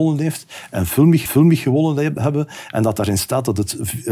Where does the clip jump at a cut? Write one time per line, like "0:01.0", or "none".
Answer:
0:01.2